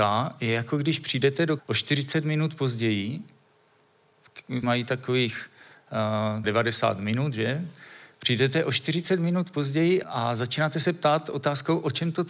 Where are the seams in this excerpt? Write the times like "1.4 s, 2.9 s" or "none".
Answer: 1.6 s, 4.6 s, 6.4 s, 10.0 s